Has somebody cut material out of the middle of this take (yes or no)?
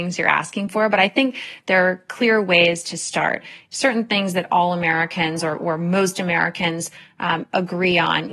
no